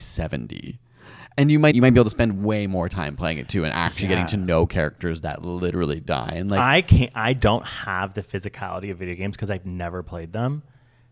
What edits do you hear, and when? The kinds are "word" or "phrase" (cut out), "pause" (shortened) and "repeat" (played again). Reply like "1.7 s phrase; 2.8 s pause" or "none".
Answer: 1.7 s word